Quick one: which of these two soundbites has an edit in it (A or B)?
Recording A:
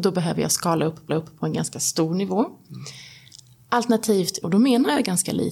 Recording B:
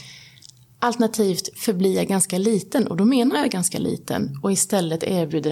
A